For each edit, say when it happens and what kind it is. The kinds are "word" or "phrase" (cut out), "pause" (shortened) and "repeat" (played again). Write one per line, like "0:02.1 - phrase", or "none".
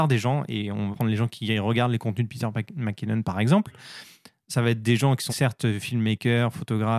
0:00.9 - word
0:05.3 - word